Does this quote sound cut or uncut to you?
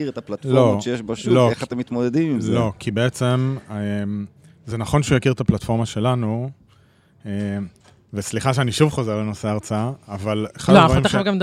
uncut